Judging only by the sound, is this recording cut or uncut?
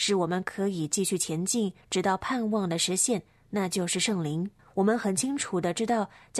cut